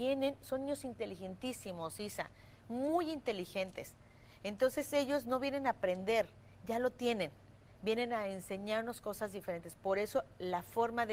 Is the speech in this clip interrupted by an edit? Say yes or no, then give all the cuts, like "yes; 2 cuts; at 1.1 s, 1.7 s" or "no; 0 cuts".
no; 0 cuts